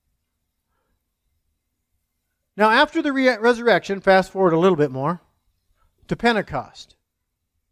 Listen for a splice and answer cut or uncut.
uncut